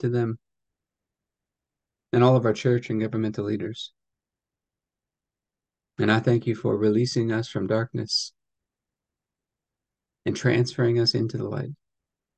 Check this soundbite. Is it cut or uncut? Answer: uncut